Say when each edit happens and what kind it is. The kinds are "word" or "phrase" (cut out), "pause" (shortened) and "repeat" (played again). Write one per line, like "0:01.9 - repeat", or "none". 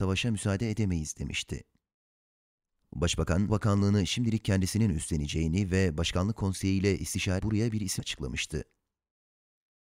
0:03.5 - word
0:07.4 - word
0:08.0 - word